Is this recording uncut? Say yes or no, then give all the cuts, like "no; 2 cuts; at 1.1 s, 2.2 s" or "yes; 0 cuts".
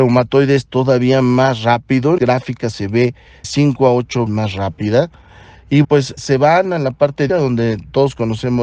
no; 6 cuts; at 2.2 s, 3.4 s, 4.3 s, 5.8 s, 6.2 s, 7.3 s